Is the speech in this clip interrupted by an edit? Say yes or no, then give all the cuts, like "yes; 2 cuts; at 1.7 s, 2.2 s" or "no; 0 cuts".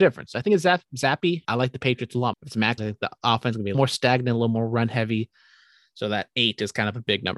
yes; 4 cuts; at 1.4 s, 2.3 s, 2.8 s, 3.7 s